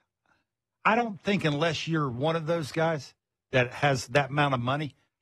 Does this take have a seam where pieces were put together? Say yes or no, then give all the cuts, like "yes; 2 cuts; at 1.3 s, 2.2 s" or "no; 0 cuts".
no; 0 cuts